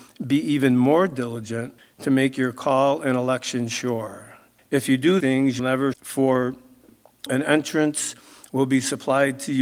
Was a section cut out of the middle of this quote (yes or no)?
yes